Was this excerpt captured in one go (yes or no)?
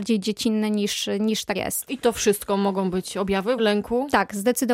no